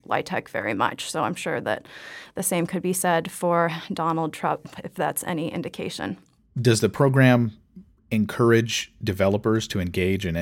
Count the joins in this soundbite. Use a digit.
0